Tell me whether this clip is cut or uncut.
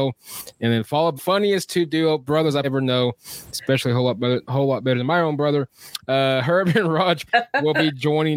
cut